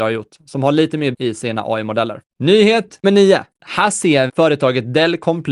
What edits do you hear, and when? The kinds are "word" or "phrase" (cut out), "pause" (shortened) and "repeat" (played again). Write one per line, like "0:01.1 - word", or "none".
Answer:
0:01.1 - word
0:03.0 - word
0:04.3 - word